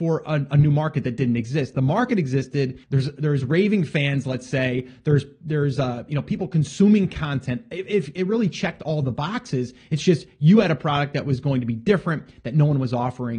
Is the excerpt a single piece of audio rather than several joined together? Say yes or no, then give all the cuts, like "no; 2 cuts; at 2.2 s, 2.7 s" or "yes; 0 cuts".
no; 1 cut; at 2.8 s